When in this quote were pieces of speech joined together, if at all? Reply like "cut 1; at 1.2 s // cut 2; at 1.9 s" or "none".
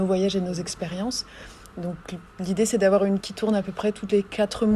cut 1; at 3.2 s